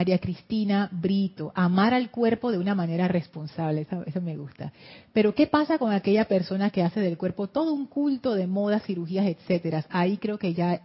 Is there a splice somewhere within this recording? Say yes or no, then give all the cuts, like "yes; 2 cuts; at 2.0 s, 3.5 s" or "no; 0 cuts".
no; 0 cuts